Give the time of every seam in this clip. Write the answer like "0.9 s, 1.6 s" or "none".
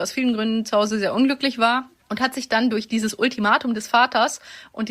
none